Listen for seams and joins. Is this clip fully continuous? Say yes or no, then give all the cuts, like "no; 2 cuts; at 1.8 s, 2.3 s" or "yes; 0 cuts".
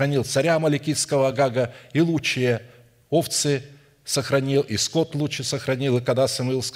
yes; 0 cuts